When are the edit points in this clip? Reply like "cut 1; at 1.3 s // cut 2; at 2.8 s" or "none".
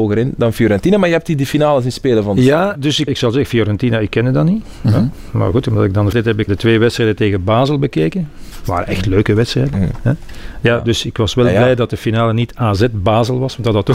cut 1; at 2.8 s // cut 2; at 3.1 s // cut 3; at 6.1 s // cut 4; at 6.5 s